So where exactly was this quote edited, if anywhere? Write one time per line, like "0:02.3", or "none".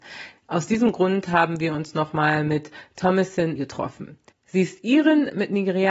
0:04.3